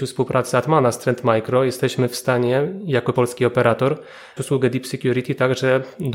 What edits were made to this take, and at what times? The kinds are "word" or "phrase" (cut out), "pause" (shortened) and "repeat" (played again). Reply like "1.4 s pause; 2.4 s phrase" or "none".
3.1 s word; 4.4 s word